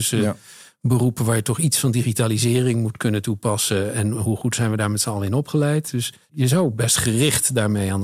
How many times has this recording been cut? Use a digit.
1